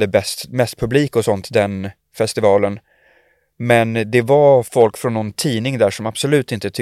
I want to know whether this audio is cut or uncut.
uncut